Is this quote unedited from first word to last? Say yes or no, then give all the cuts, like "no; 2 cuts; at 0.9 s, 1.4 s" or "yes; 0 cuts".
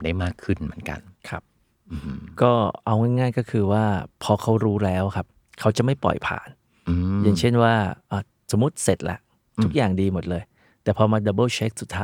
yes; 0 cuts